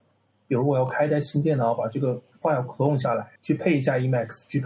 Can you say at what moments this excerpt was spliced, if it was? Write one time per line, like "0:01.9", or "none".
0:02.4
0:03.4